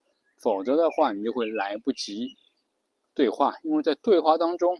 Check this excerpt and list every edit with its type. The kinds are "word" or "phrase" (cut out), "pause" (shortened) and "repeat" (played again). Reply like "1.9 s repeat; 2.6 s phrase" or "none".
none

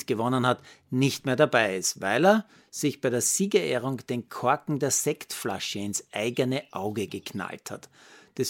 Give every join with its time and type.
none

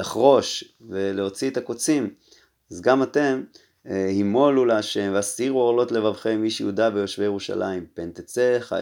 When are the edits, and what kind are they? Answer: none

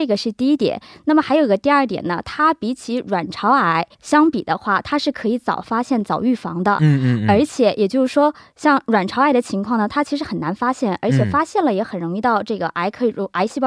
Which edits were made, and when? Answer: 3.9 s pause

